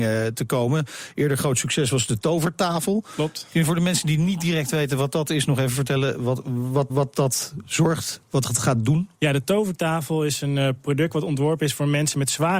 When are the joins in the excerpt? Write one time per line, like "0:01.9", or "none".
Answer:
0:06.9
0:09.1